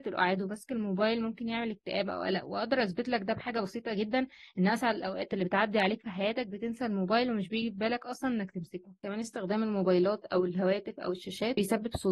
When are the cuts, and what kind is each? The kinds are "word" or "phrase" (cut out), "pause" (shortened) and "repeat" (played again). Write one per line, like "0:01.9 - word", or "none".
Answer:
none